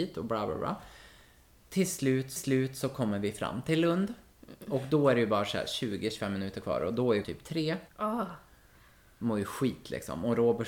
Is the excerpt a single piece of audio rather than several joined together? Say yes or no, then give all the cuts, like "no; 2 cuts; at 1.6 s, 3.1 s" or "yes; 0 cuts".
no; 3 cuts; at 2.4 s, 7.2 s, 7.9 s